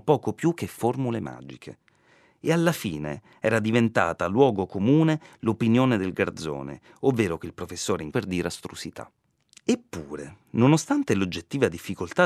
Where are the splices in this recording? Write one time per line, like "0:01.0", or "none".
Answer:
0:08.1